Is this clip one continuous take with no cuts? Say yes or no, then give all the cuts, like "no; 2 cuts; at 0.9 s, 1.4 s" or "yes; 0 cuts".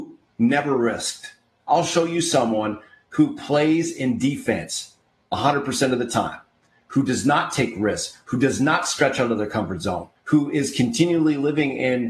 no; 1 cut; at 10.2 s